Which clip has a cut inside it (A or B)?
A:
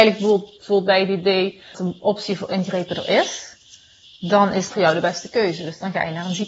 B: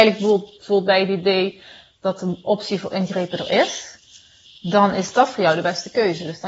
A